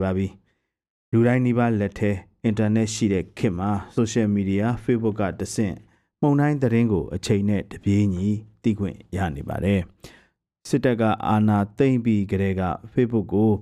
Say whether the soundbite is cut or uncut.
uncut